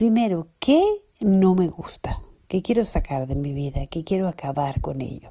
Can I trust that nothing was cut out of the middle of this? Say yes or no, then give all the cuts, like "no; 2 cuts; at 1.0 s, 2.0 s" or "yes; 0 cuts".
yes; 0 cuts